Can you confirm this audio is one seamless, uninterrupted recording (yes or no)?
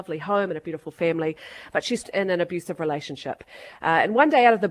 no